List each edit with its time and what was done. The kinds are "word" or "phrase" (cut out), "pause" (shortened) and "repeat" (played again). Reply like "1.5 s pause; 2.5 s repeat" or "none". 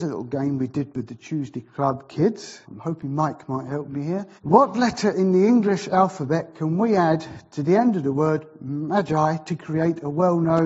2.6 s pause; 4.3 s pause